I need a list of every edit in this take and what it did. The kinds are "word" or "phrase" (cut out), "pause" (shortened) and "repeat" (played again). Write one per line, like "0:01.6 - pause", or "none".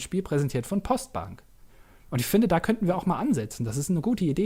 none